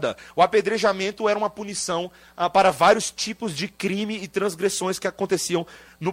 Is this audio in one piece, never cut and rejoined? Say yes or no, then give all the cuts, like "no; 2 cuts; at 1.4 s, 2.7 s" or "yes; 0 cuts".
yes; 0 cuts